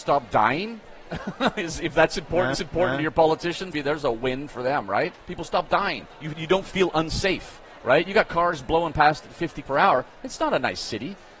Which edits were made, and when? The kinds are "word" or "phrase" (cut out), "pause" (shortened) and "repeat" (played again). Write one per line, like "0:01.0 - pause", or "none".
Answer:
0:02.5 - repeat
0:03.7 - word
0:05.2 - pause
0:06.1 - pause
0:09.6 - word